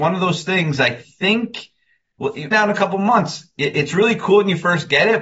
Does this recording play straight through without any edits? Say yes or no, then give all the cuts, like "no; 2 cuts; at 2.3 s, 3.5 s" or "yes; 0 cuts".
no; 1 cut; at 2.5 s